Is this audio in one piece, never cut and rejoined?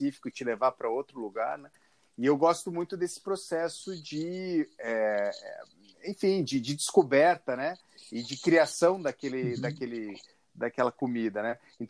yes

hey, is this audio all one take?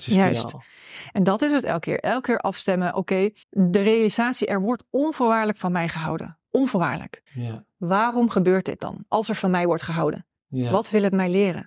no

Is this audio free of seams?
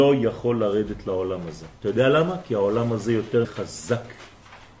no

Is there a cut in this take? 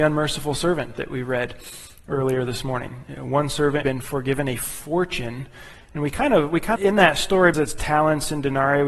yes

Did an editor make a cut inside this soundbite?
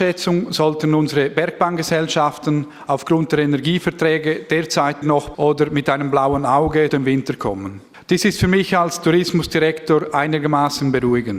yes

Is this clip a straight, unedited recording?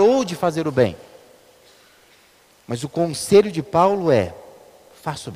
yes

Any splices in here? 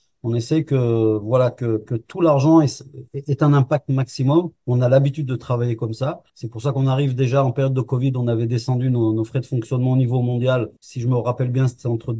yes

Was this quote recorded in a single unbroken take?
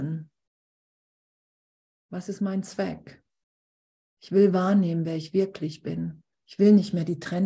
no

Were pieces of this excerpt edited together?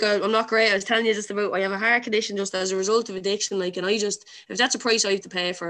no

